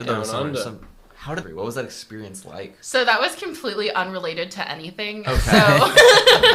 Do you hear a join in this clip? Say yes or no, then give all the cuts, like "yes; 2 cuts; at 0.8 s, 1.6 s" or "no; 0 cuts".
yes; 1 cut; at 1.4 s